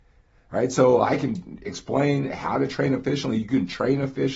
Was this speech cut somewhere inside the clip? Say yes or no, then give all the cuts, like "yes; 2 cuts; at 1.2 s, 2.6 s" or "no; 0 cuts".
no; 0 cuts